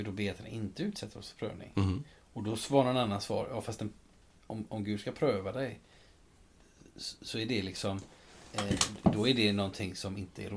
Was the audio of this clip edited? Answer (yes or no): no